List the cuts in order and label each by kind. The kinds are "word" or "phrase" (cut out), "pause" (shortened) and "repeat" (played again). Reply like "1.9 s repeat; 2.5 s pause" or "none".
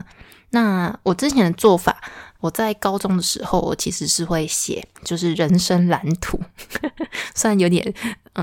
5.0 s pause